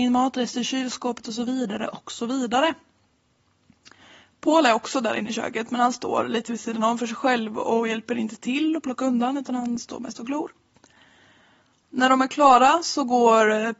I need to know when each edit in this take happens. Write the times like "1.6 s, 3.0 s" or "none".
none